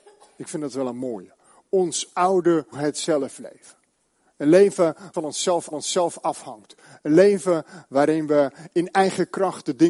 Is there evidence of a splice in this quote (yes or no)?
yes